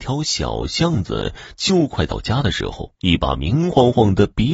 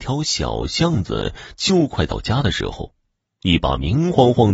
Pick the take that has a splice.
first; 1 cut; at 2.9 s

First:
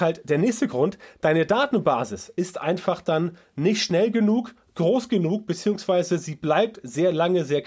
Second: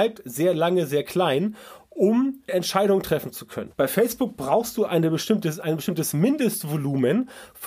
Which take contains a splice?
second; 3 cuts; at 2.5 s, 3.7 s, 4.9 s

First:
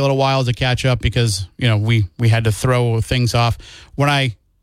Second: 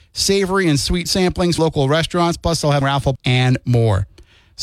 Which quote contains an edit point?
second; 4 cuts; at 1.1 s, 1.6 s, 2.8 s, 3.2 s

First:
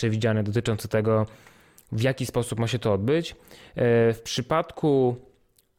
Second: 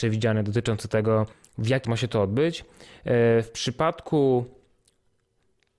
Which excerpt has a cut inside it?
second; 2 cuts; at 1.3 s, 1.8 s

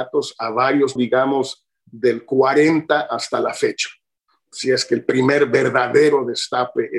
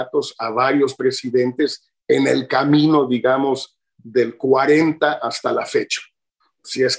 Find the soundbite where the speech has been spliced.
first; 1 cut; at 1.0 s

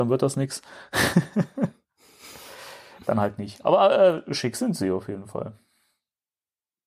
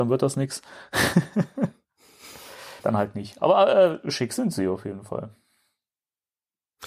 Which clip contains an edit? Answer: second; 1 cut; at 2.8 s

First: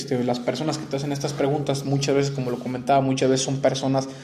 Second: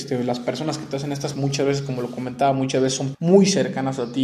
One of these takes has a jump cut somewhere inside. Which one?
second; 2 cuts; at 1.3 s, 3.1 s

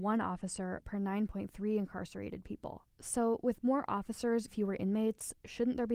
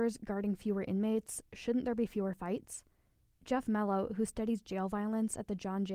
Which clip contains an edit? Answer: first; 2 cuts; at 2.9 s, 4.5 s

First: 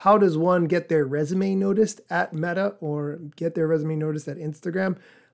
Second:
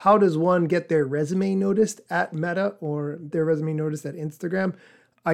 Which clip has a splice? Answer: second; 1 cut; at 3.3 s

